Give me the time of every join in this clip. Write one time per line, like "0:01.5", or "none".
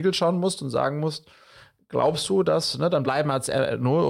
none